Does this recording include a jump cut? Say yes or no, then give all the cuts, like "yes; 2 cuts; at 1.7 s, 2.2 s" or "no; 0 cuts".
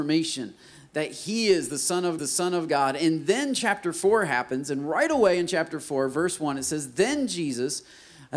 yes; 1 cut; at 2.2 s